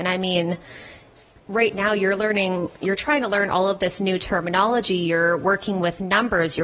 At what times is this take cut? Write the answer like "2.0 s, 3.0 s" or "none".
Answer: none